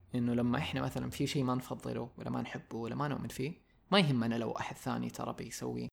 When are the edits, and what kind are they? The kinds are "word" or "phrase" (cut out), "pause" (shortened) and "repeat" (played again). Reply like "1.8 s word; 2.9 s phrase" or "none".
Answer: none